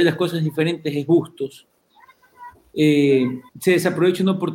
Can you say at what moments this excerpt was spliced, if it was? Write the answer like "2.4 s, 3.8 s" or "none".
3.5 s